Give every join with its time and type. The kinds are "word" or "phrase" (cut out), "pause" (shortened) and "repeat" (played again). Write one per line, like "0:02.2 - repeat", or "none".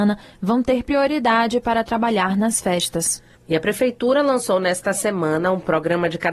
none